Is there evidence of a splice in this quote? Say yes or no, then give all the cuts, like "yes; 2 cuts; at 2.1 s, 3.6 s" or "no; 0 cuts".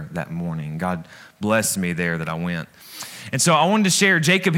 no; 0 cuts